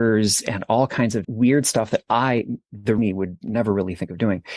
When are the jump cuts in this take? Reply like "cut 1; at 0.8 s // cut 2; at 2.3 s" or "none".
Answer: cut 1; at 1.2 s // cut 2; at 3.0 s